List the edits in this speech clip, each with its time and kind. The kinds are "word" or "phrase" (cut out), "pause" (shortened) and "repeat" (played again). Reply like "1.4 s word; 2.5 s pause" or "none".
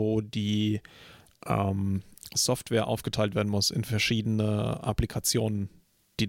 none